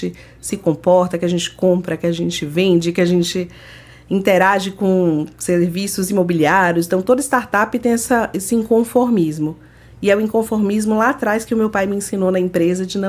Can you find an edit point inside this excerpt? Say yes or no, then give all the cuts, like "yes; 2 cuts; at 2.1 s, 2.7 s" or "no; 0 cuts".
no; 0 cuts